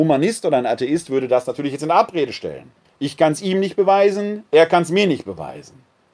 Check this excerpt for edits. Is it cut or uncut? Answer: cut